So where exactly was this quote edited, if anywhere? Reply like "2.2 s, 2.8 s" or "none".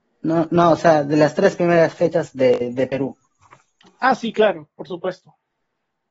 none